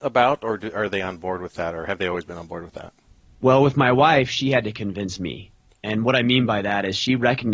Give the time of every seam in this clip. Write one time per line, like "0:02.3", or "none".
none